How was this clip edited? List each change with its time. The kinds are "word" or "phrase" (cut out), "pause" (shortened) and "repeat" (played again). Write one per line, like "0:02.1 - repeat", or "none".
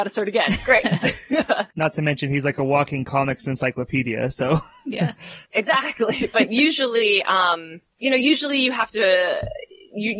0:05.4 - pause